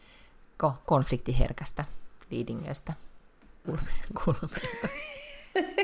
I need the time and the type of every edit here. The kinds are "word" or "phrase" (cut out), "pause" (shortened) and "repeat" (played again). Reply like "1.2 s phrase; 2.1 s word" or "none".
3.6 s word